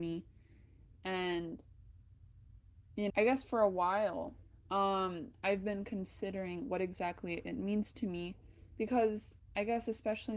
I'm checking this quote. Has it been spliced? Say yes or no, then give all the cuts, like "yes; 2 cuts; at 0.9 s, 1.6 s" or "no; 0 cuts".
yes; 2 cuts; at 3.1 s, 4.6 s